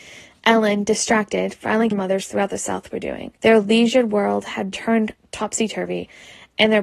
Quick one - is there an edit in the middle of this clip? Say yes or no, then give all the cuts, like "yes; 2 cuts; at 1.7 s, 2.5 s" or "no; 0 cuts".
yes; 3 cuts; at 1.9 s, 3.4 s, 4.7 s